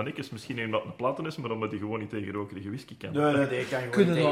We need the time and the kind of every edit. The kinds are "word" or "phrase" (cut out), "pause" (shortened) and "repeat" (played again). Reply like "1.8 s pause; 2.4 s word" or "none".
none

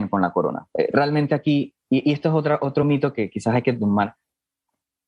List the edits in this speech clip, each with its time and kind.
none

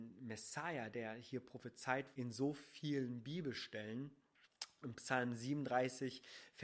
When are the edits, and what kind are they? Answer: 0.9 s word; 2.1 s word; 4.8 s word

